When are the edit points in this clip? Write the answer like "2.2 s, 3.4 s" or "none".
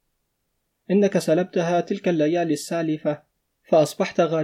none

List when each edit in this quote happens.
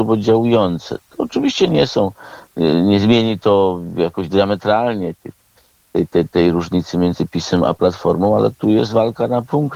none

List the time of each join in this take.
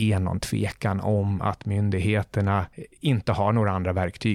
none

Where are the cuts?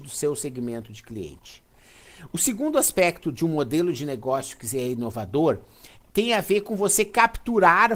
none

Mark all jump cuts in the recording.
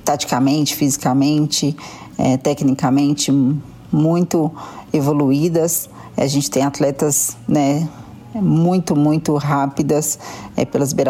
none

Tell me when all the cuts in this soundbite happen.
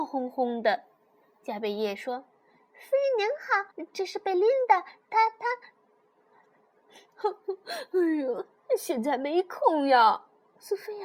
3.7 s

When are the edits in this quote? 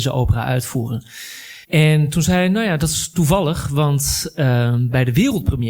1.6 s

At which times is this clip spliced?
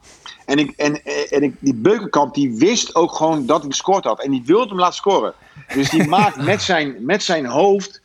3.7 s

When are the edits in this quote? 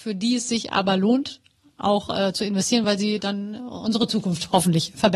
none

